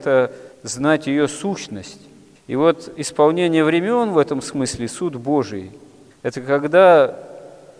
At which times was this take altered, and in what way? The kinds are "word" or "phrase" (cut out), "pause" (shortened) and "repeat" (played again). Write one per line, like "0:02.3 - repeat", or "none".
none